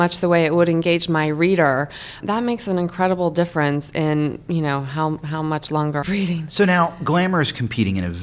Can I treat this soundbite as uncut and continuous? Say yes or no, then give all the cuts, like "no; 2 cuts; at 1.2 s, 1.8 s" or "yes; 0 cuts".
no; 2 cuts; at 2.2 s, 6.0 s